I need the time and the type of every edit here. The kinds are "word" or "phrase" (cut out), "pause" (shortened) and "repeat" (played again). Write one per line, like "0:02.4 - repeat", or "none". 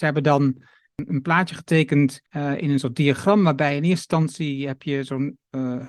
0:02.3 - pause